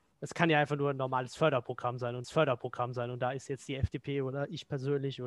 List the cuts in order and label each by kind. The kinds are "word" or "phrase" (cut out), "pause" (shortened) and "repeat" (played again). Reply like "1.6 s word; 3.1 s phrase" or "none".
2.2 s repeat

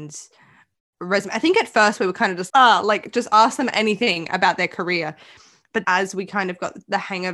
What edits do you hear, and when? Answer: 2.5 s word; 5.8 s word

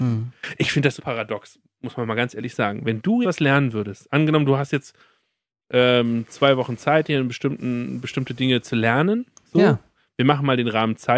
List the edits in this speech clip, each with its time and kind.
1.0 s word; 3.2 s word

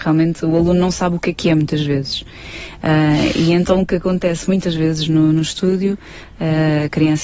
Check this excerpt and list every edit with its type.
none

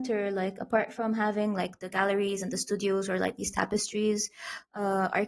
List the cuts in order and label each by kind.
none

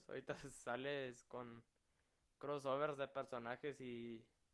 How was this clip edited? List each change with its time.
none

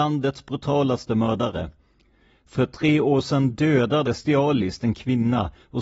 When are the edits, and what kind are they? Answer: 4.0 s word

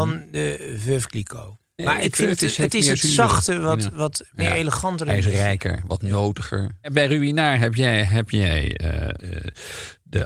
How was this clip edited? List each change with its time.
1.8 s word; 9.2 s word

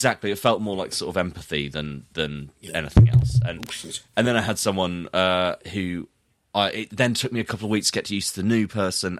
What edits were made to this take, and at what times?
none

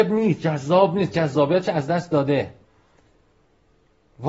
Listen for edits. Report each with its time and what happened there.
none

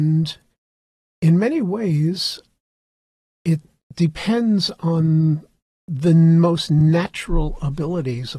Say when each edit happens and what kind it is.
none

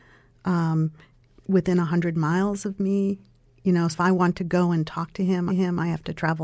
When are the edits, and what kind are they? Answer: 1.3 s pause; 3.9 s word; 5.5 s repeat

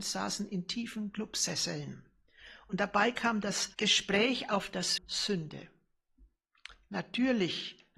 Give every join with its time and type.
3.7 s pause; 5.0 s phrase

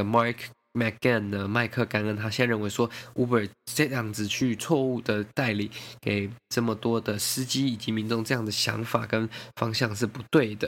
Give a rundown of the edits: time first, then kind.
none

